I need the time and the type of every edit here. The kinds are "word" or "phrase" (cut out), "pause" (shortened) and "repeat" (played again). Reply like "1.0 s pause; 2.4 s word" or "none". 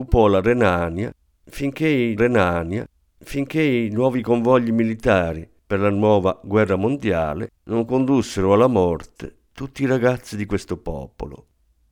2.2 s repeat; 7.6 s pause